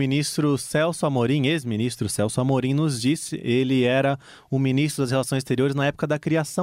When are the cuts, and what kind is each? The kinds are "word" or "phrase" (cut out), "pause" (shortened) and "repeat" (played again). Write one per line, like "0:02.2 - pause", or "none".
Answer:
none